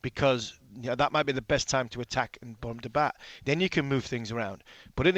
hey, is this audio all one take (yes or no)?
yes